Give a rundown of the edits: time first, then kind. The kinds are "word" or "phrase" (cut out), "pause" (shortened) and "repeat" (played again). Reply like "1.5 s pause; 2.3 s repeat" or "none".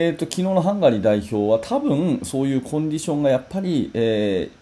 none

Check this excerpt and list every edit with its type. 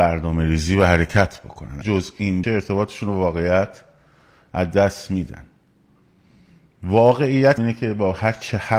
1.8 s word; 2.4 s word; 7.6 s phrase

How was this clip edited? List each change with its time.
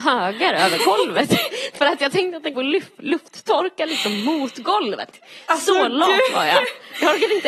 2.5 s word

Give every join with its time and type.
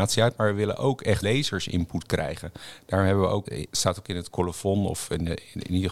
1.2 s word; 3.4 s word

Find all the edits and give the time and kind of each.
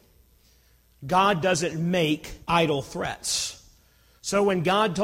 2.4 s pause

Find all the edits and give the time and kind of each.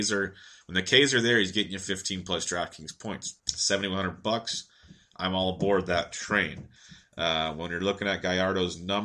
3.4 s pause

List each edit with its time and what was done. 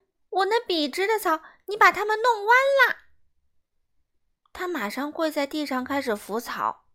none

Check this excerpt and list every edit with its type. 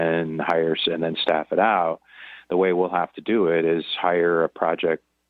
none

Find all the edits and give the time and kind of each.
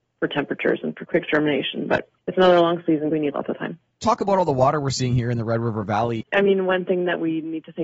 1.1 s word; 2.2 s pause; 3.1 s phrase

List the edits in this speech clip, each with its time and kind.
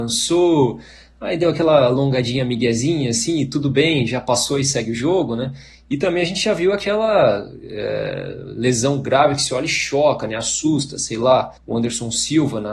11.6 s pause

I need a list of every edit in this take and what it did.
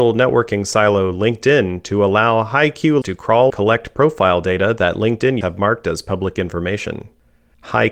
3.0 s word; 3.5 s word; 5.4 s word

